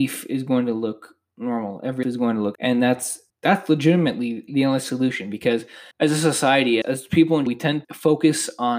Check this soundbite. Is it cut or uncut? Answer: cut